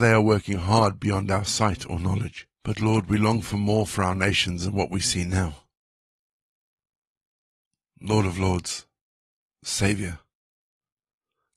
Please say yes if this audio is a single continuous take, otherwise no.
no